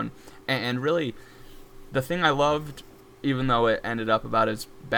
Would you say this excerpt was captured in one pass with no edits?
no; 1 cut; at 3.0 s

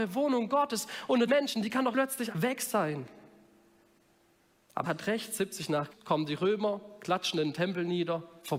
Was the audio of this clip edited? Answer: yes; 5 cuts; at 1.3 s, 1.9 s, 2.3 s, 4.8 s, 5.9 s

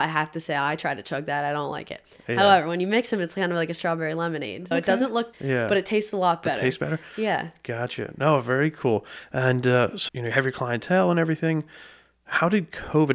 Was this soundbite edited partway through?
yes; 3 cuts; at 4.7 s, 5.3 s, 10.1 s

